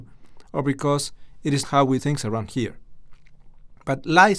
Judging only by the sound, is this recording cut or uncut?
cut